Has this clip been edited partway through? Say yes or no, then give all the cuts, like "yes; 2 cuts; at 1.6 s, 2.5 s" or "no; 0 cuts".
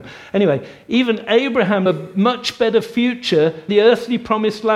yes; 2 cuts; at 1.9 s, 3.7 s